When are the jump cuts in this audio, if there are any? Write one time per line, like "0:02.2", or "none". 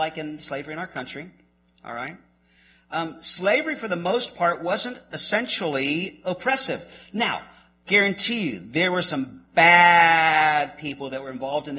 none